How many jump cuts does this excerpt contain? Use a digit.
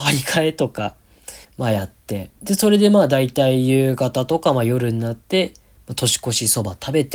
2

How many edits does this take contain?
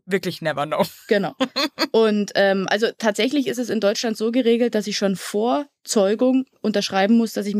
0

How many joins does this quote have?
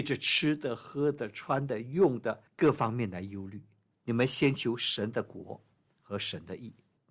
1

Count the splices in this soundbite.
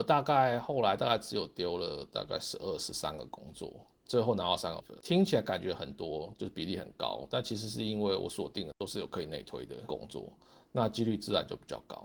2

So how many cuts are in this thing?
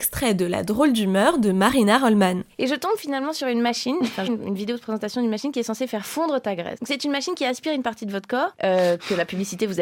1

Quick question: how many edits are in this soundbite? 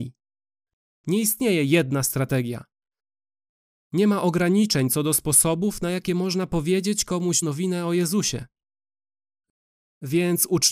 1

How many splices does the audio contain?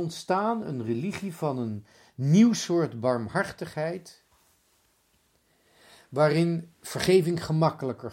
0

